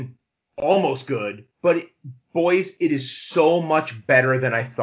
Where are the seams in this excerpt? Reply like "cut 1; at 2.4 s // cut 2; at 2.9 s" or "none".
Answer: cut 1; at 1.5 s